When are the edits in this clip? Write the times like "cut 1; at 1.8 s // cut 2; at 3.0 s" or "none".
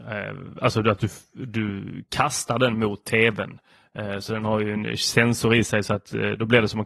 none